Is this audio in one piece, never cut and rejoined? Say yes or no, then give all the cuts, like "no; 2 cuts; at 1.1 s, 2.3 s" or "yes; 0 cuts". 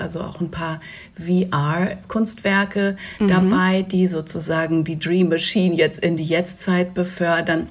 yes; 0 cuts